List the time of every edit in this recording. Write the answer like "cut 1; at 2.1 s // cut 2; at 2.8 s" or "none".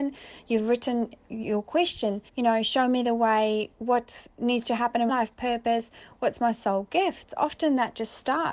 cut 1; at 2.3 s // cut 2; at 5.1 s